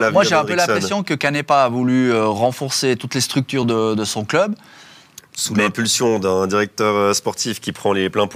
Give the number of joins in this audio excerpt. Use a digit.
0